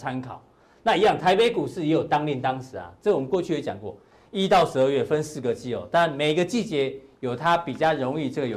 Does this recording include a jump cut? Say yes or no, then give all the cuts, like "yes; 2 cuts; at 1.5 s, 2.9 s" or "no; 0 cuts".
no; 0 cuts